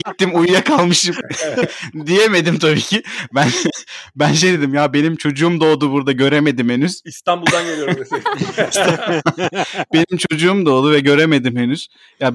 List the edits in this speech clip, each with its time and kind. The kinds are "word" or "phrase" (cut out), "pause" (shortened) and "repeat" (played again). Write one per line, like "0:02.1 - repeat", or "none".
none